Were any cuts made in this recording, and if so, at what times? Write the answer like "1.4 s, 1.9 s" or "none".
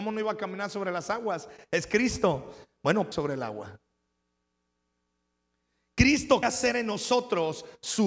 3.1 s, 6.4 s